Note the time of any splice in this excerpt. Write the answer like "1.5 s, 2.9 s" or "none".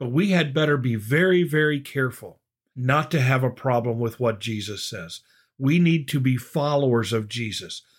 none